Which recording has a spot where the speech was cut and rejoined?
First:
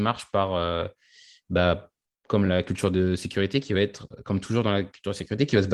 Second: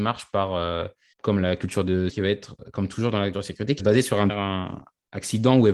second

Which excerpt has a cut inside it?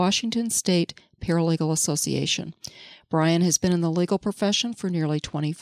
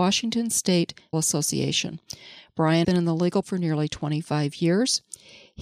second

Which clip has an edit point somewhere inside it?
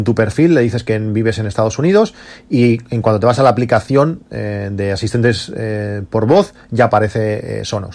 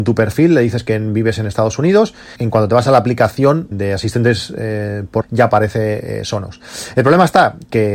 second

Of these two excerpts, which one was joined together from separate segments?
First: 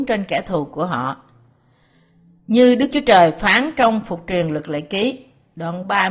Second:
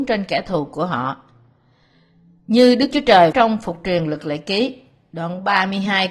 second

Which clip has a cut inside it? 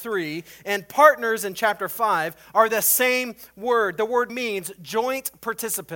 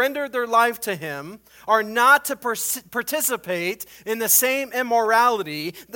first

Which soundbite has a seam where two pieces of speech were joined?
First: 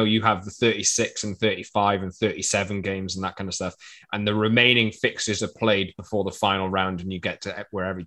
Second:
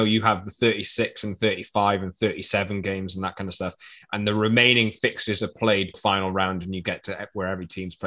second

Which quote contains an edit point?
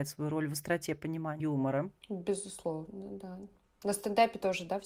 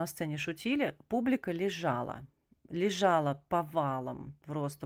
first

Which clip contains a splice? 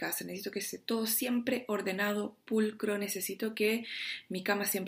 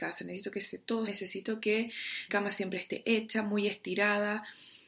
second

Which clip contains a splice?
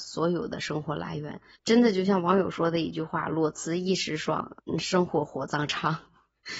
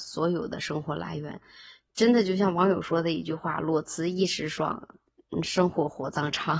first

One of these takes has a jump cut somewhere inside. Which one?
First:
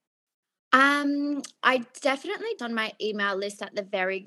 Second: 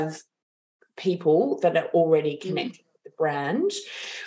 first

